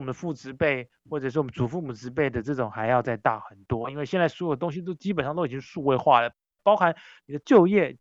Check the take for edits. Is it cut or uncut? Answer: uncut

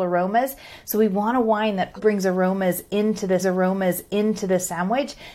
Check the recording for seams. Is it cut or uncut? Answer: cut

